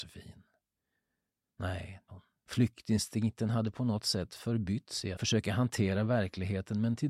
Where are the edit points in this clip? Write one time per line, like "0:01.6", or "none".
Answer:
0:02.1
0:05.1